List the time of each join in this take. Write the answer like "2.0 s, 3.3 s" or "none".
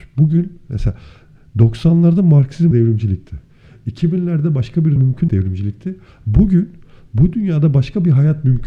2.7 s, 5.0 s, 5.3 s